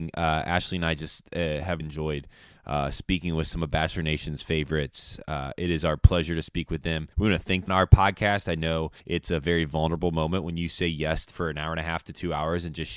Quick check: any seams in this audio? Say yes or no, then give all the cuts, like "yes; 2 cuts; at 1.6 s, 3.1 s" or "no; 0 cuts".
yes; 5 cuts; at 1.8 s, 7.1 s, 7.7 s, 9.0 s, 11.3 s